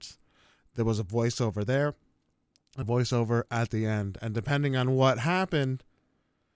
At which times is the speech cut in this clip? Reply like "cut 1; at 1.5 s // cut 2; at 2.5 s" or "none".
cut 1; at 2.8 s